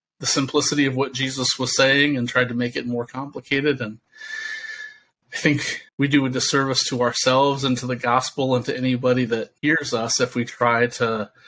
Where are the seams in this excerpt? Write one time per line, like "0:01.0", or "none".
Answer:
0:05.2
0:05.9
0:09.6